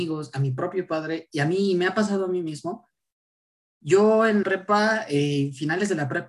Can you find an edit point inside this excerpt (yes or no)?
yes